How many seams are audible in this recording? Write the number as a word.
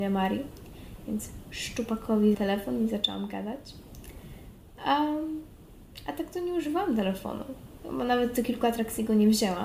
one